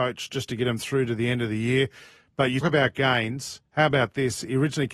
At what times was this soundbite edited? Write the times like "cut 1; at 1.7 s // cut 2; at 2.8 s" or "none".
cut 1; at 2.6 s // cut 2; at 3.7 s